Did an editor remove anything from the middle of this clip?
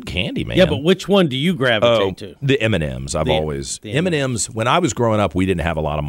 no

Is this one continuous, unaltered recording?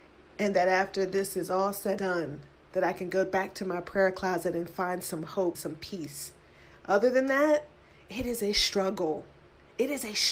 no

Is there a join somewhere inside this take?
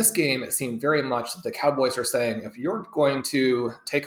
no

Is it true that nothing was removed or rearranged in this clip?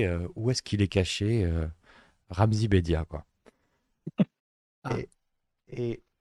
yes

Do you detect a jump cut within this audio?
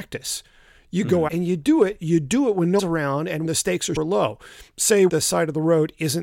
yes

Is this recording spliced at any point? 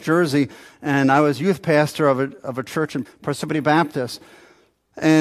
yes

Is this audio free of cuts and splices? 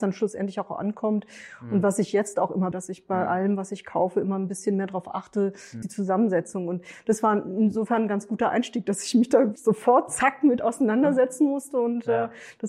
no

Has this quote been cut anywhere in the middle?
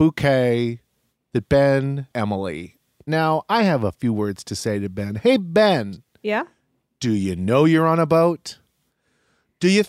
yes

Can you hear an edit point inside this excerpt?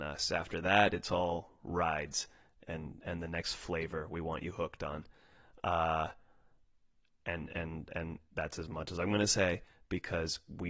no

